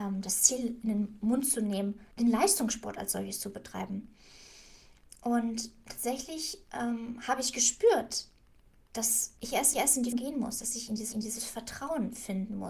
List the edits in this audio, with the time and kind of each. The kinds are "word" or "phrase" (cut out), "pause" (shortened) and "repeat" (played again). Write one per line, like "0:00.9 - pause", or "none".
0:02.1 - pause
0:09.4 - pause
0:09.7 - repeat
0:10.1 - word
0:11.1 - repeat